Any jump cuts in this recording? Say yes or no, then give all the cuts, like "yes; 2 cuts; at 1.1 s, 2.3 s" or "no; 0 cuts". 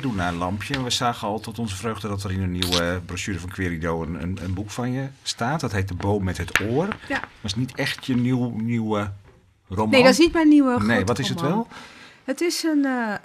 no; 0 cuts